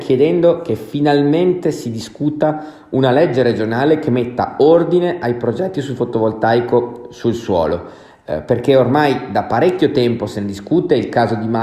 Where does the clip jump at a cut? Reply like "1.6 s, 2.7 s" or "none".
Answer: none